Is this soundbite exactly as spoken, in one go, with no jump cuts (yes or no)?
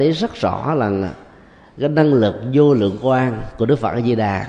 yes